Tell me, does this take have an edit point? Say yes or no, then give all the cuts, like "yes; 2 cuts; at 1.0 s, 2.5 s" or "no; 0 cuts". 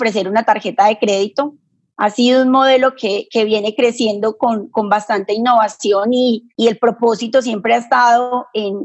yes; 1 cut; at 6.5 s